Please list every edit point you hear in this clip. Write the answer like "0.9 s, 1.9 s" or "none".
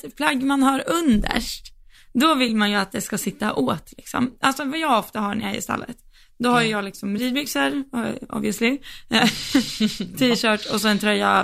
none